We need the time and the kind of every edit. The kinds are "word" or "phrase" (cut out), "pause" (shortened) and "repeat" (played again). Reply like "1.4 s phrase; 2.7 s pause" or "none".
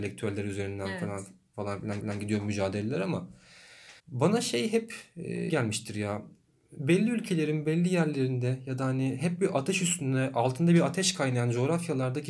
2.0 s repeat; 4.0 s pause; 5.5 s word